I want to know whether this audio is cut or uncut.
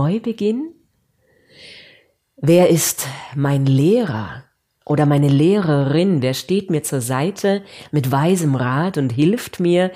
uncut